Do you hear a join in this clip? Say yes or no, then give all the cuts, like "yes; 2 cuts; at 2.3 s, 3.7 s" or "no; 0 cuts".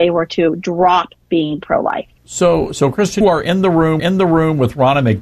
yes; 4 cuts; at 1.2 s, 2.2 s, 3.2 s, 4.0 s